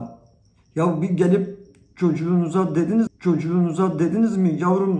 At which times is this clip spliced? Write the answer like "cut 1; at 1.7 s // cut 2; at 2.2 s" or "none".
cut 1; at 3.1 s